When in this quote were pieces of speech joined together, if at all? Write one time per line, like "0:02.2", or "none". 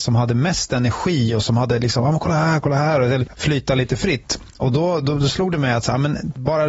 0:03.3